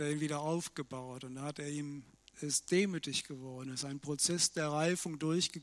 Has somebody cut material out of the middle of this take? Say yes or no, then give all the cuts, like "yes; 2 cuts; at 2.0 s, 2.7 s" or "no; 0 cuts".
yes; 1 cut; at 2.3 s